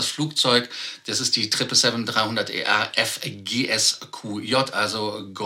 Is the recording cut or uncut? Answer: uncut